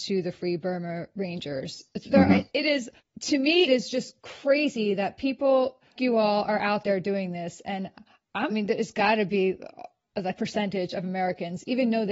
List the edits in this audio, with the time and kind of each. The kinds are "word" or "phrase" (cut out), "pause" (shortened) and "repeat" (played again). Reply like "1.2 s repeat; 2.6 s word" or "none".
3.0 s pause; 3.7 s word; 6.0 s word; 8.5 s phrase; 10.4 s phrase